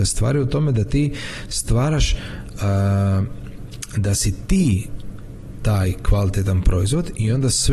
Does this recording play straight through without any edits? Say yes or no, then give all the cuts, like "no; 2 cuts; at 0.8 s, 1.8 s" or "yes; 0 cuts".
yes; 0 cuts